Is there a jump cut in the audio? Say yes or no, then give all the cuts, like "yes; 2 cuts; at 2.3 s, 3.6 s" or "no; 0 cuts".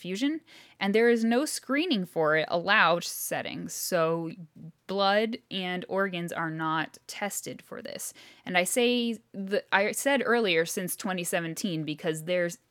yes; 1 cut; at 3.0 s